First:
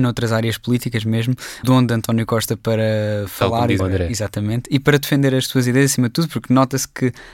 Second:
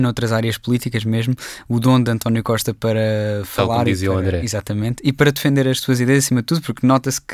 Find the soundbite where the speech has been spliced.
first; 2 cuts; at 1.6 s, 3.8 s

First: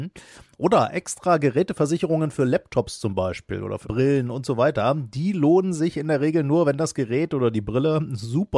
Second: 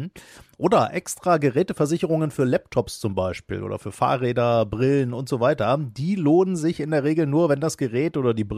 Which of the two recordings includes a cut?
first; 1 cut; at 3.8 s

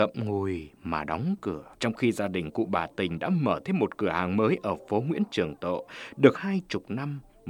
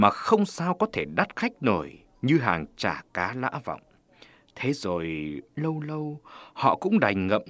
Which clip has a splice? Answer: first; 2 cuts; at 1.7 s, 6.3 s

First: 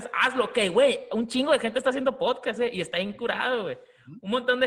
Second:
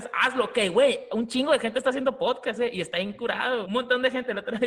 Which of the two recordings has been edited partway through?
second; 1 cut; at 3.6 s

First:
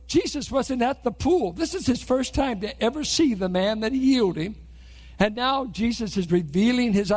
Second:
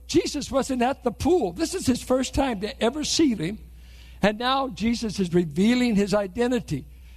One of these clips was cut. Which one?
second; 1 cut; at 3.4 s

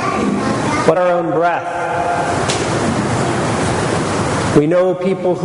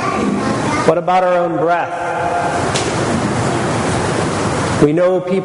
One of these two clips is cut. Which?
first; 1 cut; at 1.0 s

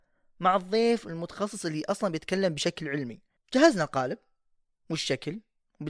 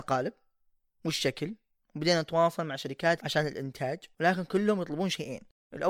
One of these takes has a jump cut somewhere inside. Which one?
second; 1 cut; at 3.2 s

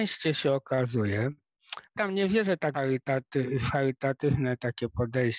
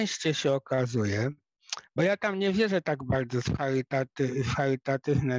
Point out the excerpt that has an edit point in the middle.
first; 2 cuts; at 1.9 s, 2.7 s

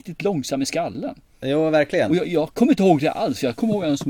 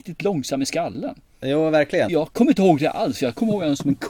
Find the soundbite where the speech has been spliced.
second; 1 cut; at 2.1 s

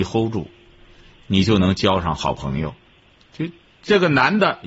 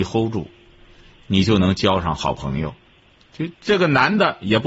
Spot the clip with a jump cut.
second; 1 cut; at 3.5 s

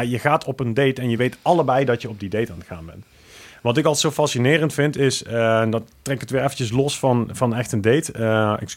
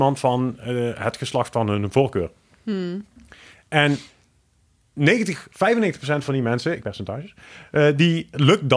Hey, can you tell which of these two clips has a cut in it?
second; 1 cut; at 6.8 s

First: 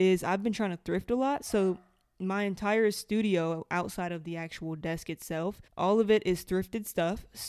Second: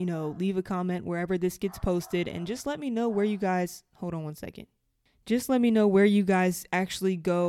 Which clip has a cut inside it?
first; 1 cut; at 5.7 s

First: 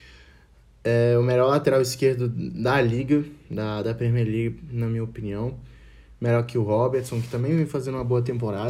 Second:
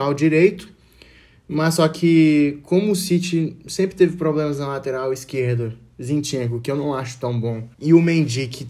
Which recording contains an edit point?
second; 1 cut; at 7.7 s

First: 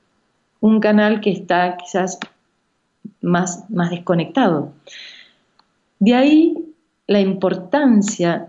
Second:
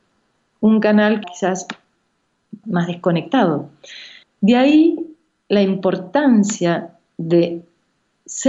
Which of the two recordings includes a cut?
second; 3 cuts; at 1.2 s, 2.6 s, 4.2 s

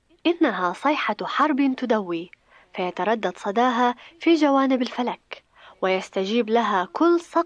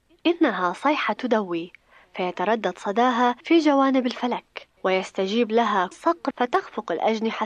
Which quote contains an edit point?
second; 5 cuts; at 1.2 s, 3.4 s, 4.8 s, 5.9 s, 6.3 s

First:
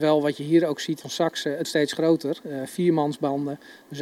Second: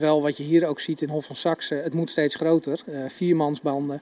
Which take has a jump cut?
first; 2 cuts; at 1.0 s, 1.6 s

